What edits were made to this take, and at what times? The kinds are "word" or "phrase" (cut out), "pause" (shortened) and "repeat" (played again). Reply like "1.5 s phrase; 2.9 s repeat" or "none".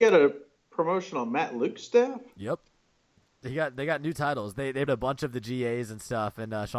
4.9 s word